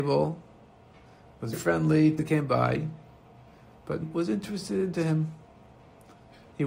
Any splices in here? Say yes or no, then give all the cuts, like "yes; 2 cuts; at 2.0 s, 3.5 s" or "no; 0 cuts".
yes; 4 cuts; at 1.5 s, 2.2 s, 4.0 s, 4.9 s